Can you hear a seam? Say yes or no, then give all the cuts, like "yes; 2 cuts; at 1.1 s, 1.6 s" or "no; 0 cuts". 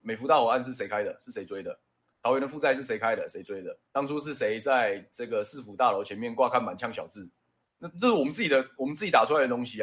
yes; 2 cuts; at 3.9 s, 7.6 s